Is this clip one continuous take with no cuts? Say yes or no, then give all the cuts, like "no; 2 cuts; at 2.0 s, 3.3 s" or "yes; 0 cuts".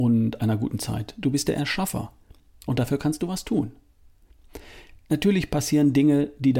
yes; 0 cuts